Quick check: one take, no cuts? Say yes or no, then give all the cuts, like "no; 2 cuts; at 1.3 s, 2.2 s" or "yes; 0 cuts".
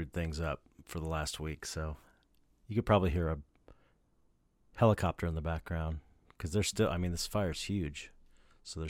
yes; 0 cuts